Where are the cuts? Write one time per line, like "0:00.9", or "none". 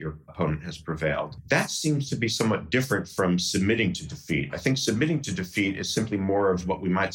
none